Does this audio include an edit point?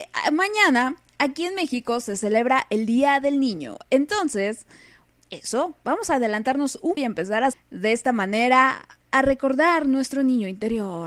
yes; 3 cuts; at 5.1 s, 7.0 s, 7.5 s

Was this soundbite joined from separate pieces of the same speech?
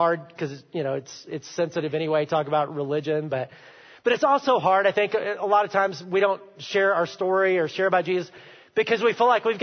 no; 0 cuts

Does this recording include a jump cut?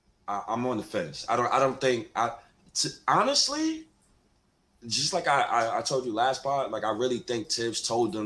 no; 0 cuts

